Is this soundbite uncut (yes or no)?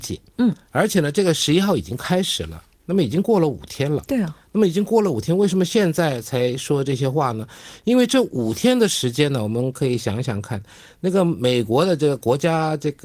yes